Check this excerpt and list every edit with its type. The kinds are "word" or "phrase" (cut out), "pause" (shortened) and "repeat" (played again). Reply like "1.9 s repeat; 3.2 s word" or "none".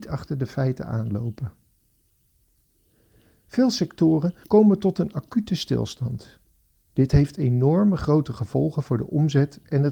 4.4 s pause